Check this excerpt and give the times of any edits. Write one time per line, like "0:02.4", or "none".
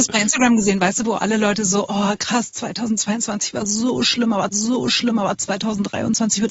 0:04.5